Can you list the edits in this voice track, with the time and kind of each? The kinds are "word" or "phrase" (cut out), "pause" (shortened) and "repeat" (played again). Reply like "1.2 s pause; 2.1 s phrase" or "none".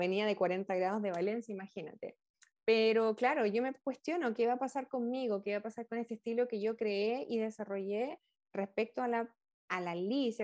none